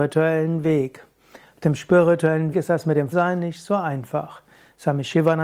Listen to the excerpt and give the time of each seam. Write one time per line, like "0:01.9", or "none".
0:02.5
0:03.1